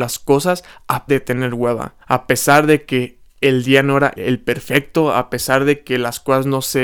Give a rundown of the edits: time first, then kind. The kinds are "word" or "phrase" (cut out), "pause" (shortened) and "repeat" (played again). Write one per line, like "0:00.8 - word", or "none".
0:01.1 - word
0:02.0 - pause
0:03.3 - pause
0:04.2 - word